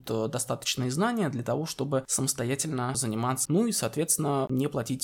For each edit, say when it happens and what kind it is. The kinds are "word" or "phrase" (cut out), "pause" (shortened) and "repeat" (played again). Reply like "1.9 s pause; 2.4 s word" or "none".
3.5 s word